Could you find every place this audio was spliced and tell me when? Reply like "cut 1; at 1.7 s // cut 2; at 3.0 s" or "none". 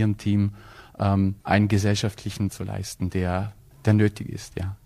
cut 1; at 1.4 s // cut 2; at 2.5 s // cut 3; at 3.7 s